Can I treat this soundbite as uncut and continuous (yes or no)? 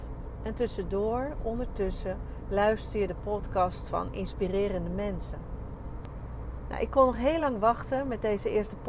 yes